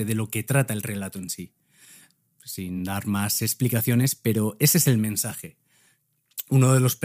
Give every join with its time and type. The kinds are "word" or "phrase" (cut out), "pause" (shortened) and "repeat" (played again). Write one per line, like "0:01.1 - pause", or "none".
none